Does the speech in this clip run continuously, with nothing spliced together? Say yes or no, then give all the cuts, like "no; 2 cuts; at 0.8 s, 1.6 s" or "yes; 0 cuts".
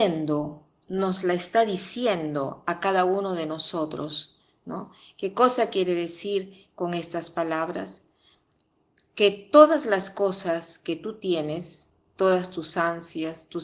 yes; 0 cuts